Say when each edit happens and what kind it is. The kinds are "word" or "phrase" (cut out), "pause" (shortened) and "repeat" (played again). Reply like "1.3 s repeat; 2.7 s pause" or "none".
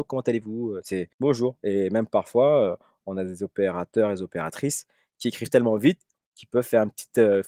1.1 s pause